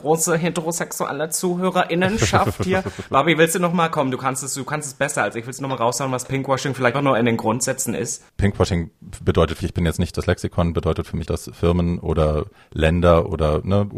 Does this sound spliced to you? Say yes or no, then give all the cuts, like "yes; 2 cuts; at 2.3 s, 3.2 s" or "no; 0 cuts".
yes; 3 cuts; at 6.9 s, 9.6 s, 11.2 s